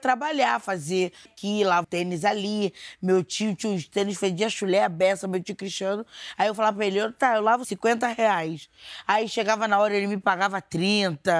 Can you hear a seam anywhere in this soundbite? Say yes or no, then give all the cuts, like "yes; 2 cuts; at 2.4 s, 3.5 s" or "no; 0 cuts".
yes; 3 cuts; at 1.3 s, 1.8 s, 7.6 s